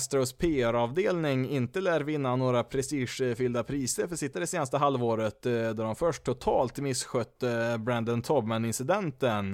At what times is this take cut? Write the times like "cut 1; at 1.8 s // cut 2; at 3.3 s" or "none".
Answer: cut 1; at 4.3 s

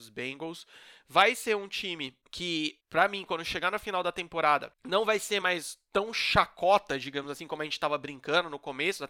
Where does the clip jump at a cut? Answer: none

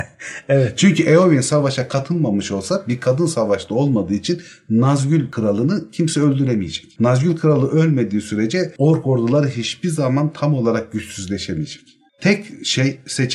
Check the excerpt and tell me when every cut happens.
none

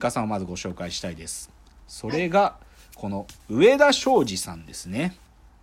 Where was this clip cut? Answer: cut 1; at 3.4 s

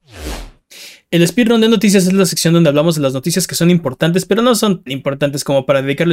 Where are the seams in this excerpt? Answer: cut 1; at 4.9 s

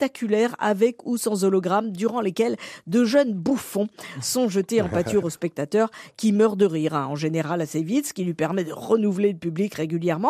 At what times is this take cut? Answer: none

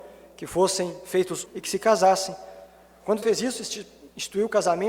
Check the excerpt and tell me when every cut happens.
cut 1; at 1.5 s // cut 2; at 3.2 s

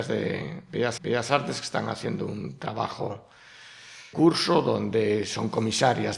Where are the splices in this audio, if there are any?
cut 1; at 1.0 s // cut 2; at 4.1 s

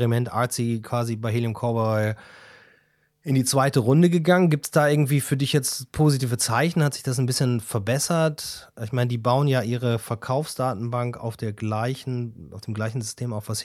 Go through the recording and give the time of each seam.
none

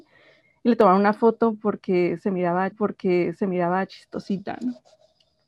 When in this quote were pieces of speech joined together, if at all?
cut 1; at 2.7 s

